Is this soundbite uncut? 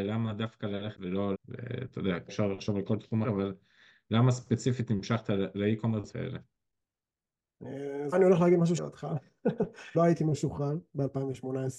no; 8 cuts; at 0.9 s, 1.3 s, 2.3 s, 3.2 s, 6.1 s, 8.1 s, 8.8 s, 9.9 s

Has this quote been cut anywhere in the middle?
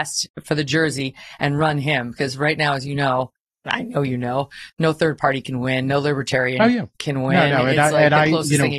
no; 0 cuts

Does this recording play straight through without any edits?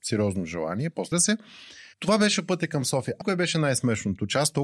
no; 3 cuts; at 1.1 s, 1.9 s, 3.2 s

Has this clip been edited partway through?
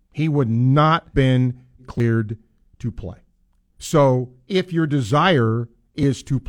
yes; 3 cuts; at 1.1 s, 1.8 s, 3.4 s

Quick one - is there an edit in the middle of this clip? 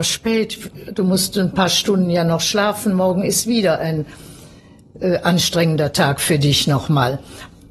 no; 0 cuts

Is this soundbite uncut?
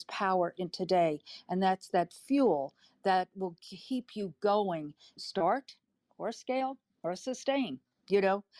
no; 1 cut; at 5.2 s

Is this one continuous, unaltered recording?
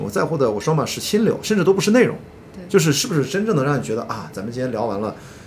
yes; 0 cuts

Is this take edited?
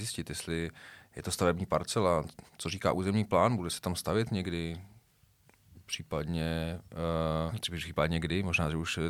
yes; 2 cuts; at 2.5 s, 7.5 s

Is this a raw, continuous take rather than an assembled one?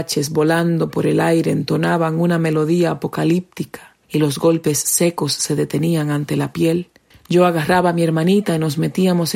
no; 2 cuts; at 4.0 s, 7.1 s

